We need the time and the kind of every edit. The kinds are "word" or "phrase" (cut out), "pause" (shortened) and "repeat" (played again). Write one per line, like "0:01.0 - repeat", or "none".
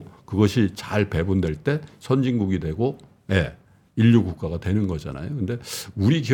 none